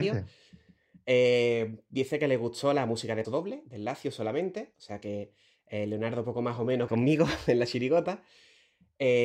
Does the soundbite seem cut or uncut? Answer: cut